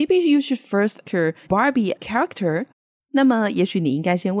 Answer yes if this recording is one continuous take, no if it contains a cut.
no